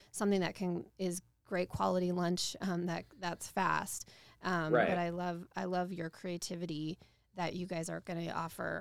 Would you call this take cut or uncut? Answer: uncut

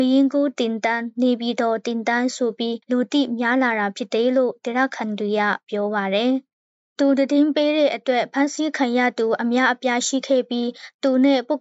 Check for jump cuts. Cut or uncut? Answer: cut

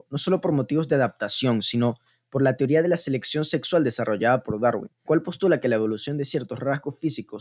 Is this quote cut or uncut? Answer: cut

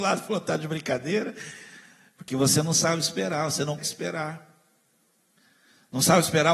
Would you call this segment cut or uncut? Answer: cut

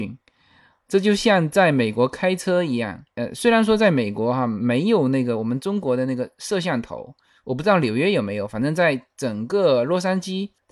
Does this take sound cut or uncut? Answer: uncut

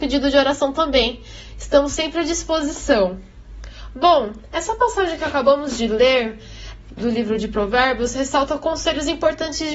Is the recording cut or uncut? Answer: uncut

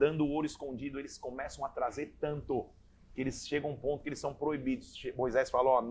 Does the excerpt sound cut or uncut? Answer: uncut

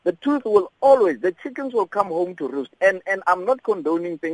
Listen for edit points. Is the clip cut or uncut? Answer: uncut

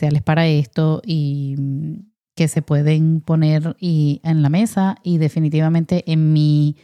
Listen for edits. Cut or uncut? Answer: uncut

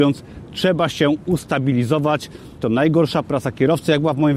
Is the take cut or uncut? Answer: cut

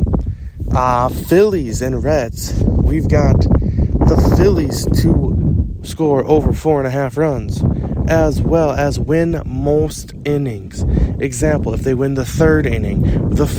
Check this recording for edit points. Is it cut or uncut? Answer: uncut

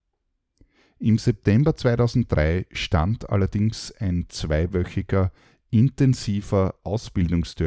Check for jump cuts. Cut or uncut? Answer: uncut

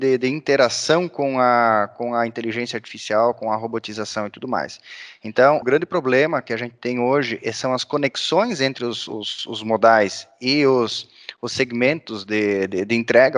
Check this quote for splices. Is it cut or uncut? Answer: cut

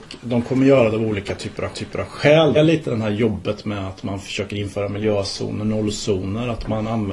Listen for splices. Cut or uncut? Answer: cut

